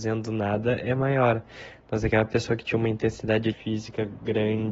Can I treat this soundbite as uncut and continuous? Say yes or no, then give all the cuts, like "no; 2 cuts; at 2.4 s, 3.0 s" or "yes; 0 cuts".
no; 1 cut; at 3.5 s